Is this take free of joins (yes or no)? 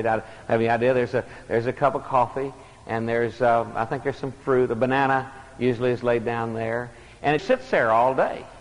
no